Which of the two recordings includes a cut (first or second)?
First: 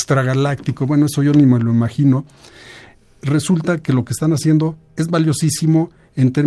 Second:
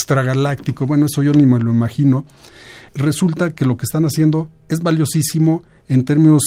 second